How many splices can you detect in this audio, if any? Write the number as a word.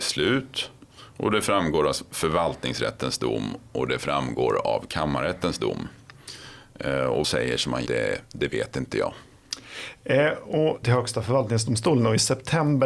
four